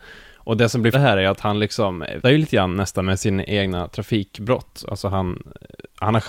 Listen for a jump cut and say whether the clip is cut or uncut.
cut